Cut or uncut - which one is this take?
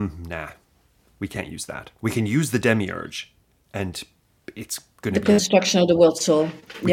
uncut